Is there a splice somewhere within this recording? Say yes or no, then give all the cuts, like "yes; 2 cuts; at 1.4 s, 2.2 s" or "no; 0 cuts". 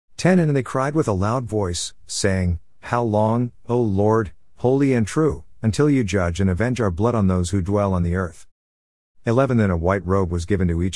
no; 0 cuts